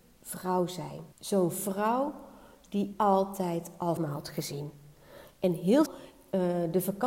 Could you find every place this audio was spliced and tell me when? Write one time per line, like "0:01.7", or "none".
0:01.1
0:02.9
0:04.0
0:05.9